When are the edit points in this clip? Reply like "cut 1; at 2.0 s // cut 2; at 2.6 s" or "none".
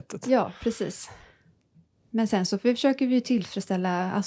none